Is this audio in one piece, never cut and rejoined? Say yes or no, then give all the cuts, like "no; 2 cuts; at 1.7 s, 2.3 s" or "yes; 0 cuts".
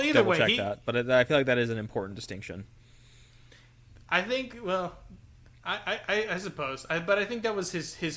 yes; 0 cuts